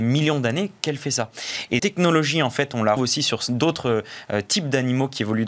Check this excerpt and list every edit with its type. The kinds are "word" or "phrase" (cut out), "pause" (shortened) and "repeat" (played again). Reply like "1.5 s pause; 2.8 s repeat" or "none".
1.8 s word; 3.0 s word